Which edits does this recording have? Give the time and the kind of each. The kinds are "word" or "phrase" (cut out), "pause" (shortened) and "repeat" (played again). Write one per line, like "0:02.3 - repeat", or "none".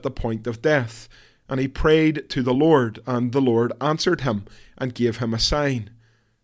none